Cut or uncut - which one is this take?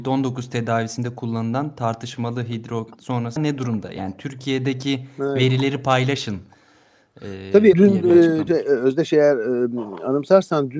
cut